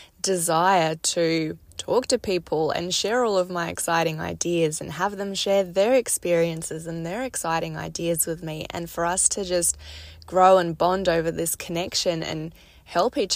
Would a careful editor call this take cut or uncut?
cut